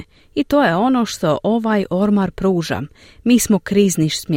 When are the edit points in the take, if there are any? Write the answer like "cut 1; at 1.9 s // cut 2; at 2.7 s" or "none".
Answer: none